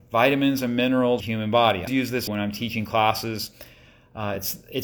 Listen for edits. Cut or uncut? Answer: cut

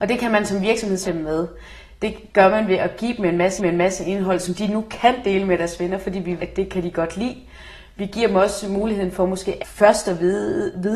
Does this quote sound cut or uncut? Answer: cut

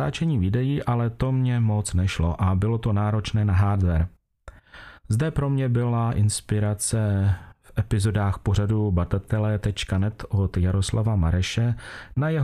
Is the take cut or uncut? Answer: uncut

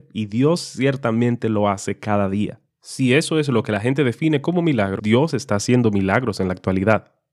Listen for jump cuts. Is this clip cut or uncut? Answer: cut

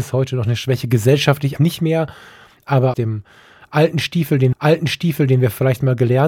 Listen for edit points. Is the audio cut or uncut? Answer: cut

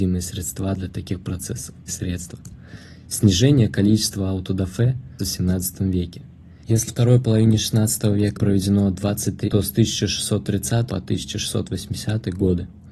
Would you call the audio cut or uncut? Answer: cut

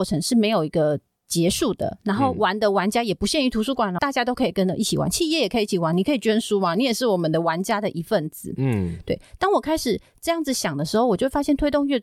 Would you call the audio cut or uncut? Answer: cut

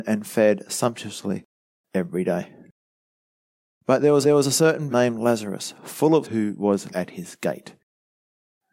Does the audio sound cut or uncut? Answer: cut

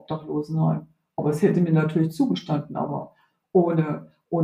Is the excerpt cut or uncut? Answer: uncut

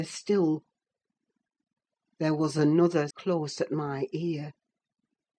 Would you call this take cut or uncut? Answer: cut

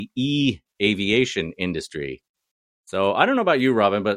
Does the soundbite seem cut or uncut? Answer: uncut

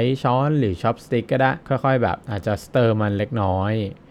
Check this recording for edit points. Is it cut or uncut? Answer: cut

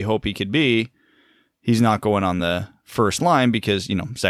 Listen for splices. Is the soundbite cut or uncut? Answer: uncut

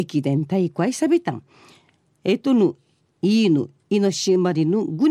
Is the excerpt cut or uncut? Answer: uncut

